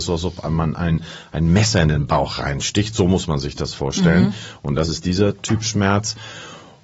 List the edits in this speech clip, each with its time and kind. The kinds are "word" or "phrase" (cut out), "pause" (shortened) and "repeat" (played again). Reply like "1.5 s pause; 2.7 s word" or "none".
none